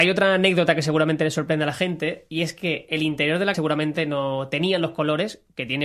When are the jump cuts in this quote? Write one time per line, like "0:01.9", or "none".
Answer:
0:03.5